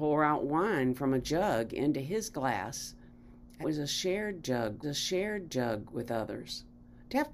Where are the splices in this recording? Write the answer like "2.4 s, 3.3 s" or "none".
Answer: 3.6 s, 4.8 s